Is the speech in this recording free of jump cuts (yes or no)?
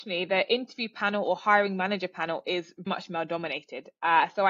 no